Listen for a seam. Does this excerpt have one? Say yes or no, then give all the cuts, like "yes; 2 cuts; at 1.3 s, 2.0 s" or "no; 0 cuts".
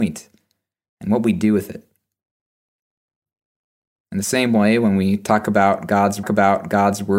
yes; 1 cut; at 6.2 s